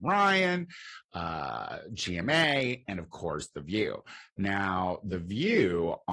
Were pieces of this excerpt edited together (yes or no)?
no